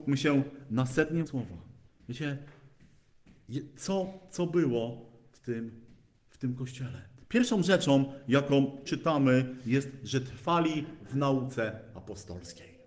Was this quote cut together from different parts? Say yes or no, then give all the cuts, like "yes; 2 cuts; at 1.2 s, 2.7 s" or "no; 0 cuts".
yes; 4 cuts; at 1.3 s, 1.9 s, 7.2 s, 8.9 s